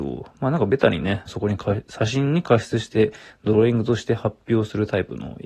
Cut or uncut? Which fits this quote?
cut